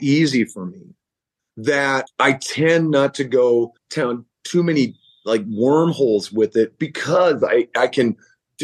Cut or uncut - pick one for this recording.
cut